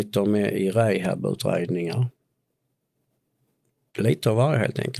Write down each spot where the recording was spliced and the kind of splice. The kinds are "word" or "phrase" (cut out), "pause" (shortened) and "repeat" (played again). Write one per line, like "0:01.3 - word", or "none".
none